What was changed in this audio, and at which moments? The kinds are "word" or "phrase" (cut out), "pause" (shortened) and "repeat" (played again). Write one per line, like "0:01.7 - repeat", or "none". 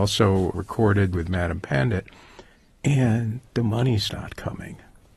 0:01.1 - phrase
0:02.5 - pause